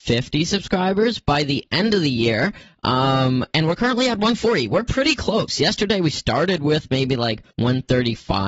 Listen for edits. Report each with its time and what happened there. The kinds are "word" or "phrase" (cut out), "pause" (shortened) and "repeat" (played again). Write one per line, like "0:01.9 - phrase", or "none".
0:07.5 - pause